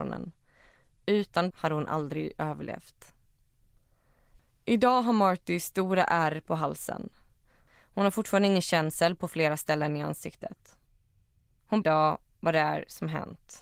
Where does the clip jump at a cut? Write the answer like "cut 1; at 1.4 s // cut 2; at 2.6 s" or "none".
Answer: cut 1; at 1.5 s // cut 2; at 11.8 s